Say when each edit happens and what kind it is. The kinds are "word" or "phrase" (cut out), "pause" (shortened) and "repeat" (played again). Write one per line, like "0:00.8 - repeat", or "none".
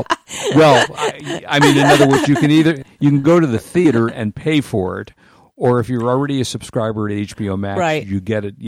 none